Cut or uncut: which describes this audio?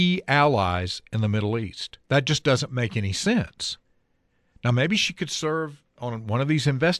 cut